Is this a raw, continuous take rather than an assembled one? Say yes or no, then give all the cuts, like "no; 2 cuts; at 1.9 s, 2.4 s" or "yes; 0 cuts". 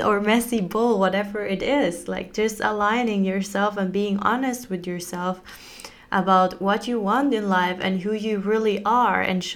yes; 0 cuts